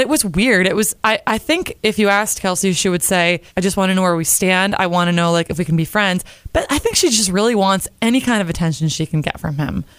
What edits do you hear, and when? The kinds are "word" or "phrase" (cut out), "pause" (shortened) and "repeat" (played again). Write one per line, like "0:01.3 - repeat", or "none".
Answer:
0:03.5 - pause